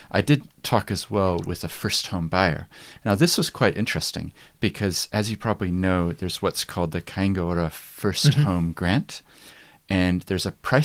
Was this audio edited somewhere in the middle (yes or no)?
no